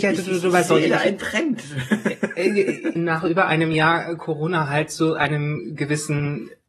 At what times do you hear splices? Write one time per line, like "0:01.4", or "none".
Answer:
0:03.0